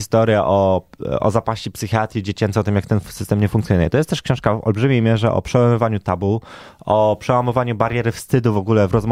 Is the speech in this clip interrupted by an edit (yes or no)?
no